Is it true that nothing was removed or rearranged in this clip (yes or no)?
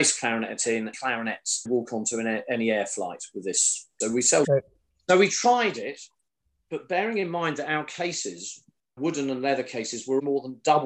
no